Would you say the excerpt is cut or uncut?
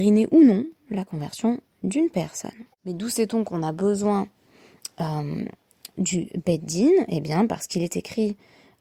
cut